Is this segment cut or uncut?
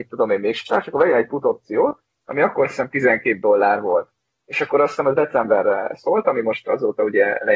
uncut